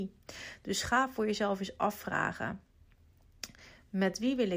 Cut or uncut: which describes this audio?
uncut